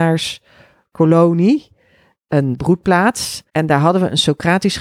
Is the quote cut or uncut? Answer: cut